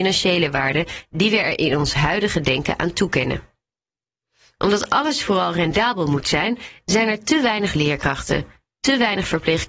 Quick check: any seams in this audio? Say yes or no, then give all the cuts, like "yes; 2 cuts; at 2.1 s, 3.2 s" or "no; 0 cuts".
no; 0 cuts